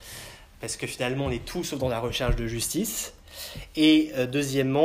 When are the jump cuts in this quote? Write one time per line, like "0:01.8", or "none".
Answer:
none